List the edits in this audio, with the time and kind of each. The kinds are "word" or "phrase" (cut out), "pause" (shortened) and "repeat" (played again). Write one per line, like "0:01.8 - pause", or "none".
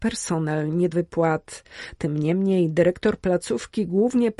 0:00.9 - word